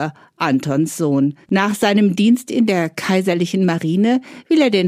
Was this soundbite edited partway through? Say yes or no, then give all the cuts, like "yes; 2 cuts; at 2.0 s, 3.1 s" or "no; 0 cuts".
yes; 1 cut; at 1.4 s